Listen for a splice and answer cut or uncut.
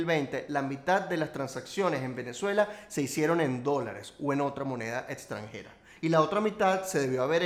uncut